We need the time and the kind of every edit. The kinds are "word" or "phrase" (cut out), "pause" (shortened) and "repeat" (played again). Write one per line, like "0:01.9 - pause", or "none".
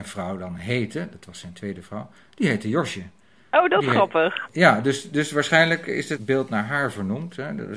none